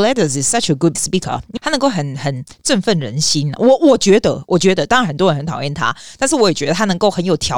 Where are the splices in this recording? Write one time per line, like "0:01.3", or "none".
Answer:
0:00.9